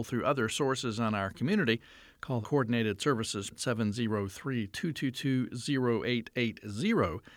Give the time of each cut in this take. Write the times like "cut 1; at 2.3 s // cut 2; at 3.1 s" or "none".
cut 1; at 2.4 s // cut 2; at 3.5 s